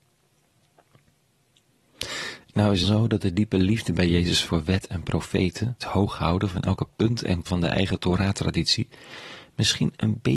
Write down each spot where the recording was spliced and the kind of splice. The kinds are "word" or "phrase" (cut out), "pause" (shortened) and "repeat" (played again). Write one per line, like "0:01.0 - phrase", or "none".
0:02.8 - phrase
0:04.5 - word
0:05.8 - word
0:07.5 - word